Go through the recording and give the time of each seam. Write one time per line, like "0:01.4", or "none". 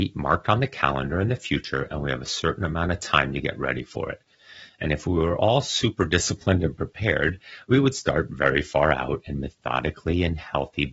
none